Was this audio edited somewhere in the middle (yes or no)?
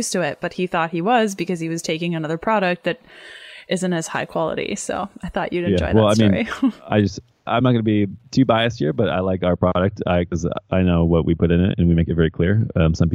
no